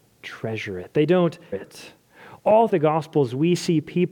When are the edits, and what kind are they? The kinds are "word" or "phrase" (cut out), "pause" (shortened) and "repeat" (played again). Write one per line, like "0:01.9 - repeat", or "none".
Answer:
0:01.5 - word
0:02.7 - word